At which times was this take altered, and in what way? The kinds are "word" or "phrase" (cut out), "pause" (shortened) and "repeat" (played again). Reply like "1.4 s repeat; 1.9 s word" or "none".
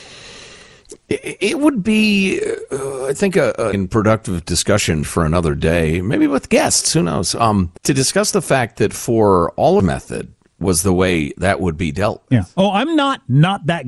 3.7 s word; 5.0 s word; 7.8 s pause; 9.8 s phrase